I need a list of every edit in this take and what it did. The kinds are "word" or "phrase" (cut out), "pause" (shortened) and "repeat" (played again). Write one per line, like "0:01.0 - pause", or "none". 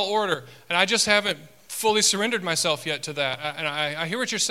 none